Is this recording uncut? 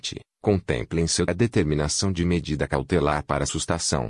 no; 1 cut; at 1.3 s

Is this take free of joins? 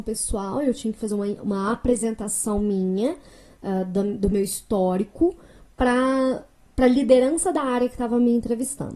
yes; 0 cuts

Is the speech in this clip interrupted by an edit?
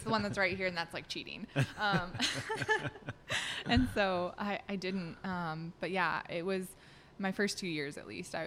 no; 0 cuts

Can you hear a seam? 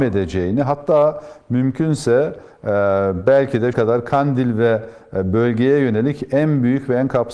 yes; 1 cut; at 3.7 s

